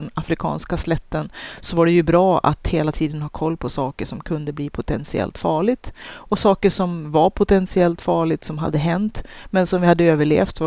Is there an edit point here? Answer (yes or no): no